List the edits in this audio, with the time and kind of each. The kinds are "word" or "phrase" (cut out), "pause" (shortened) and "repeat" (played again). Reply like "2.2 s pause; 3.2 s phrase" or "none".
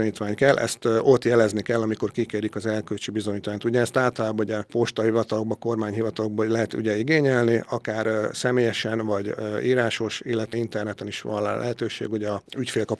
10.5 s word